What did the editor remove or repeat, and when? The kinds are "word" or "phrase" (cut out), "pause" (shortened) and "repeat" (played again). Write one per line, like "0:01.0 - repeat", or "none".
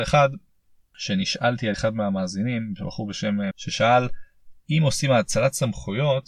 0:01.7 - word
0:03.5 - word